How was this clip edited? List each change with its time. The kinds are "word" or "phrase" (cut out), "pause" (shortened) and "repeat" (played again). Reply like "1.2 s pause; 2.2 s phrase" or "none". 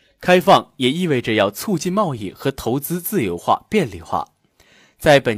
none